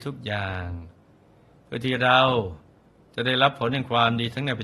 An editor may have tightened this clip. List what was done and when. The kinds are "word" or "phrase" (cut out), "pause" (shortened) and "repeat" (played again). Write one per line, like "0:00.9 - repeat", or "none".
none